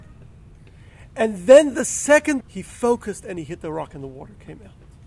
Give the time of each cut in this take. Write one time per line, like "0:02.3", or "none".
0:02.4